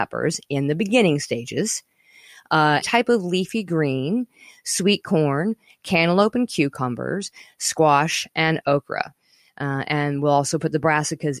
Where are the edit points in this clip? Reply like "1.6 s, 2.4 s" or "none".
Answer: 2.8 s